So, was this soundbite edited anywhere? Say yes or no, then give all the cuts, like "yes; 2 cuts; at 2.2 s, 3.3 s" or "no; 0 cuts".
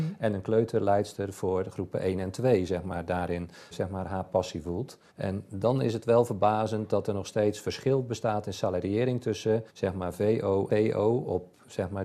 yes; 4 cuts; at 3.7 s, 5.1 s, 9.7 s, 10.7 s